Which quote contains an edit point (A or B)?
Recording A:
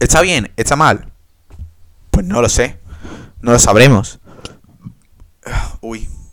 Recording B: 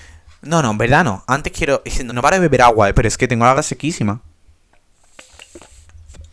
B